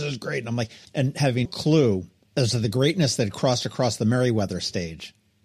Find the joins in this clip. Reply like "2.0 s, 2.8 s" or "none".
1.5 s